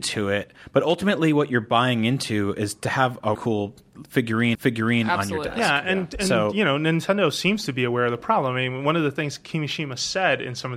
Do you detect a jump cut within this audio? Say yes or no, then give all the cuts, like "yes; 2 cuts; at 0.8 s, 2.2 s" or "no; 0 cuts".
yes; 2 cuts; at 3.3 s, 4.5 s